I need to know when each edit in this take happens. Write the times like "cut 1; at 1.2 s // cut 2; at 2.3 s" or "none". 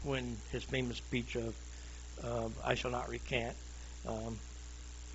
none